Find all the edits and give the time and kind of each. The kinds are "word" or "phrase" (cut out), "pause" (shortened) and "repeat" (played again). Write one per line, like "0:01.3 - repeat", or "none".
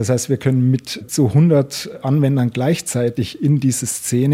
0:01.1 - word